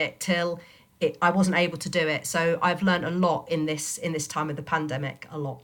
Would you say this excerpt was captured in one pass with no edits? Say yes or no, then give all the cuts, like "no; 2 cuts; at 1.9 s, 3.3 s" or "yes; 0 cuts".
yes; 0 cuts